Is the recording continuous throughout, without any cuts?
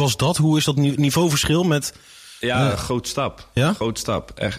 yes; 0 cuts

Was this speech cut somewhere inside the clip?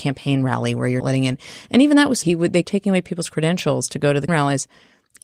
yes; 4 cuts; at 1.0 s, 2.2 s, 2.6 s, 4.3 s

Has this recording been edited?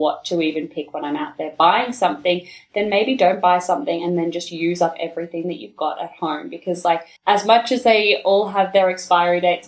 yes; 1 cut; at 7.2 s

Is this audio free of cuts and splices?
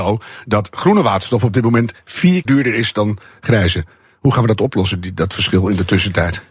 no; 1 cut; at 2.5 s

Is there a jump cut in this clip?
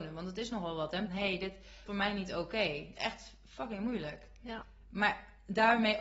yes; 3 cuts; at 1.1 s, 1.9 s, 2.9 s

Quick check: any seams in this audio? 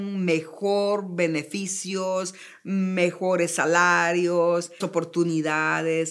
yes; 1 cut; at 4.8 s

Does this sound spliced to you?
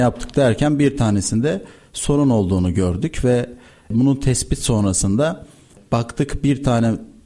no; 0 cuts

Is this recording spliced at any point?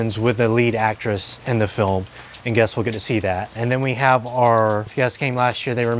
yes; 1 cut; at 4.9 s

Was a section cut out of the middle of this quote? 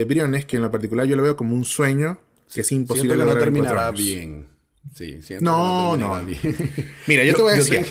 no; 0 cuts

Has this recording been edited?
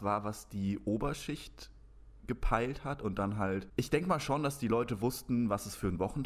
no; 0 cuts

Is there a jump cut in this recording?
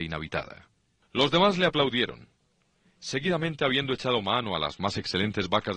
no; 0 cuts

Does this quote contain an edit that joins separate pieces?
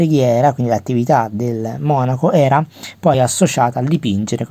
no; 0 cuts

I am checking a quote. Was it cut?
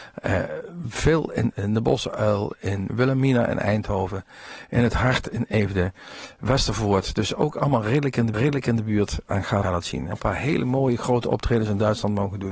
yes; 5 cuts; at 1.5 s, 2.9 s, 8.3 s, 9.6 s, 10.1 s

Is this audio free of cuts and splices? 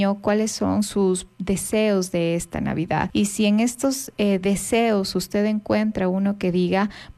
yes; 0 cuts

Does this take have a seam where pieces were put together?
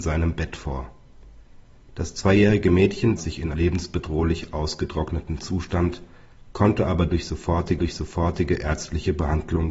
yes; 3 cuts; at 3.2 s, 3.5 s, 7.8 s

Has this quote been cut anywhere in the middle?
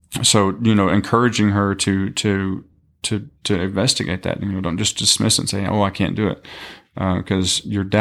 no; 0 cuts

